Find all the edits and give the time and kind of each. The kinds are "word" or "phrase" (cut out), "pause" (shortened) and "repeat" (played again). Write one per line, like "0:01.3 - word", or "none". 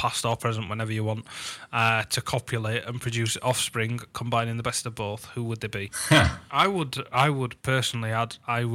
none